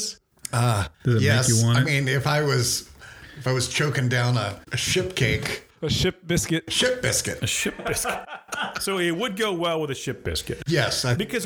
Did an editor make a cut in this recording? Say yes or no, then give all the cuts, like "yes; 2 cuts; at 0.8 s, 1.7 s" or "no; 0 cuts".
yes; 2 cuts; at 0.9 s, 4.6 s